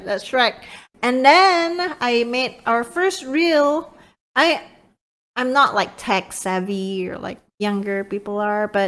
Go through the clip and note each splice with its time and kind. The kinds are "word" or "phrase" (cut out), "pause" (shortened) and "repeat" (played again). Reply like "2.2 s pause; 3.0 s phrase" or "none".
none